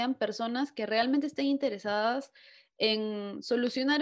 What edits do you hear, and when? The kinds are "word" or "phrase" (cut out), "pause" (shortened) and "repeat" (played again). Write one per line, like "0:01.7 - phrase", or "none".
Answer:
none